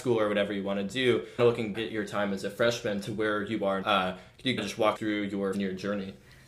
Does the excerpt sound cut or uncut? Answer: cut